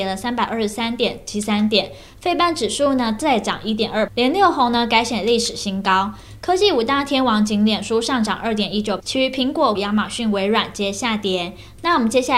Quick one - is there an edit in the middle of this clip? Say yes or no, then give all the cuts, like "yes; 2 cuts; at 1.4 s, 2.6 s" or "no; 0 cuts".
yes; 3 cuts; at 4.1 s, 9.0 s, 9.7 s